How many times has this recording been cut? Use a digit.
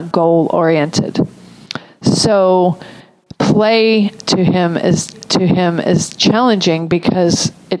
1